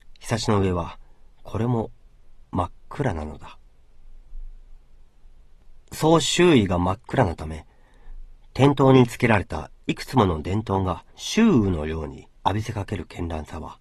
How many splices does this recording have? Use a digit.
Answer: 3